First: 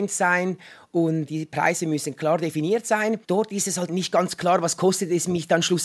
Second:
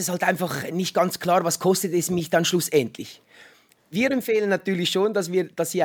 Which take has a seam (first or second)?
first